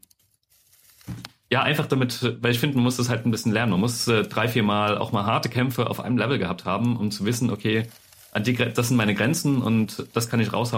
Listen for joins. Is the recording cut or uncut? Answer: uncut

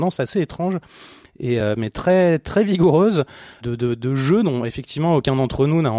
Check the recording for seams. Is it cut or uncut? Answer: uncut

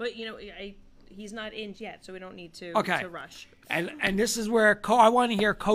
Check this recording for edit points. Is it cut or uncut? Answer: cut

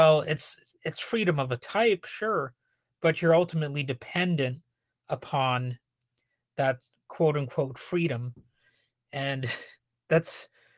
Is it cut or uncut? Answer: uncut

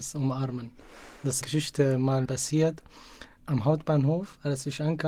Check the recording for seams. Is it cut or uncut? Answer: cut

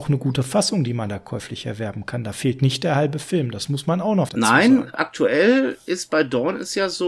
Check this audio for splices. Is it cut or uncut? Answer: cut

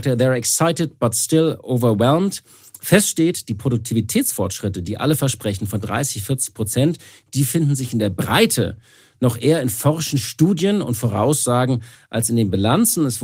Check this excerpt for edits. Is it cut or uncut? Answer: uncut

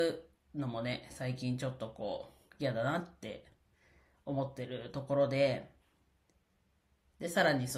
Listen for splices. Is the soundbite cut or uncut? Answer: uncut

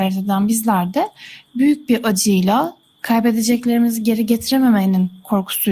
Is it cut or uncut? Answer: uncut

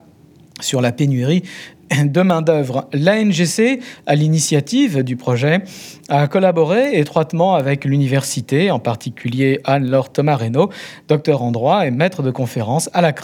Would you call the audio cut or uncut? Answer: uncut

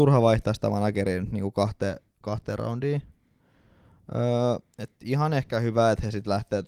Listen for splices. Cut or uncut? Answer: uncut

